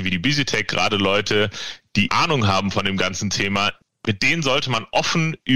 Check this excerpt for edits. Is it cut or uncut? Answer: cut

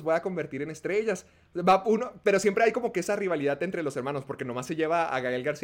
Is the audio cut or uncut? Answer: uncut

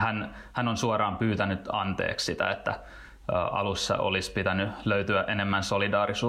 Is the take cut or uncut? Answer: uncut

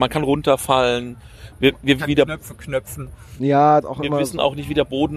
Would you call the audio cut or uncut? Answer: cut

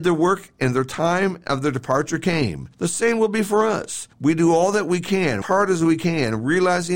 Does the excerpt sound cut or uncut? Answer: cut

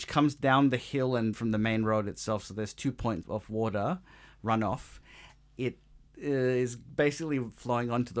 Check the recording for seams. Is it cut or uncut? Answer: cut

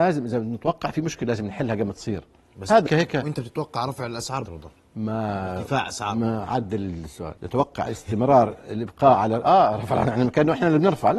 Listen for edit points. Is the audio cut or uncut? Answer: cut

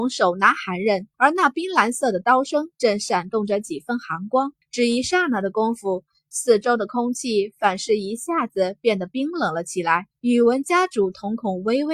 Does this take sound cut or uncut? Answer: cut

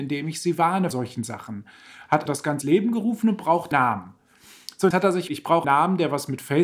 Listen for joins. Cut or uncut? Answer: cut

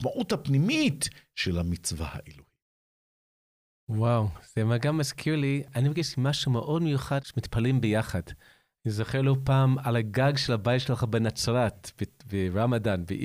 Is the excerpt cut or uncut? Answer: uncut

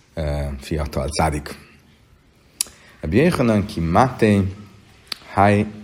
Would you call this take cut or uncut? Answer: uncut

